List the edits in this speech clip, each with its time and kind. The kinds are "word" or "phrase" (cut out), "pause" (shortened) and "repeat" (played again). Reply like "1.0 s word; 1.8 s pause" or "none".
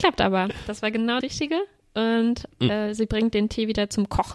1.2 s word